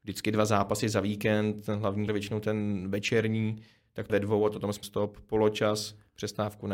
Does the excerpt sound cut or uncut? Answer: cut